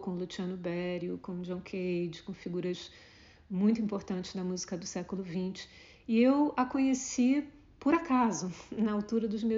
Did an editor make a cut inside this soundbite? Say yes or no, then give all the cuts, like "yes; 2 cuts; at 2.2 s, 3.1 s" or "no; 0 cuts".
no; 0 cuts